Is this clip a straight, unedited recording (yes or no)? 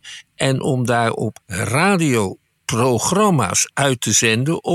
no